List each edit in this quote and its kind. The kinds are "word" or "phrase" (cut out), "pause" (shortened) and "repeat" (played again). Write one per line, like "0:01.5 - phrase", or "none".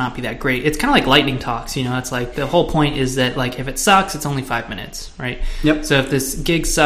none